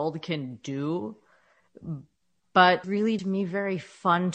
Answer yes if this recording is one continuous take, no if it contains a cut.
no